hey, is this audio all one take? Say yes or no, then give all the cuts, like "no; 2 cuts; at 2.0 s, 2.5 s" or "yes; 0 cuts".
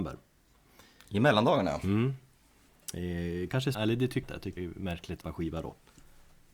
no; 4 cuts; at 3.7 s, 4.2 s, 4.6 s, 5.2 s